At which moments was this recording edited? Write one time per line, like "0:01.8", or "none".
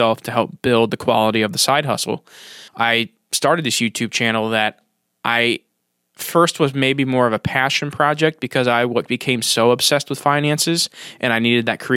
0:02.7